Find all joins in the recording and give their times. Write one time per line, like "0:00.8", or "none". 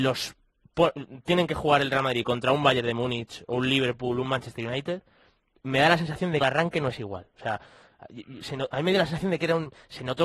0:06.4